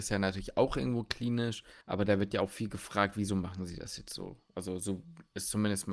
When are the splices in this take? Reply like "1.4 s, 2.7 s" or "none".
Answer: 1.8 s